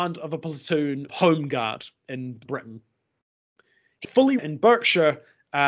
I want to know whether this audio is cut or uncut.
cut